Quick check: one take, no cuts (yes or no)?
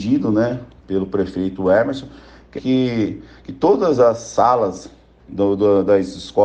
no